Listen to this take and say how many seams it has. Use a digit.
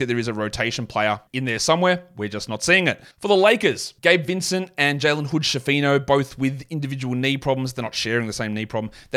3